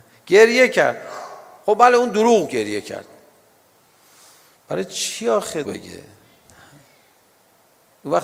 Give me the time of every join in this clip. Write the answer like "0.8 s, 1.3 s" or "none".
2.5 s, 5.6 s